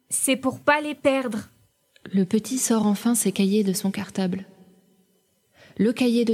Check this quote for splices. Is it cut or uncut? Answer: uncut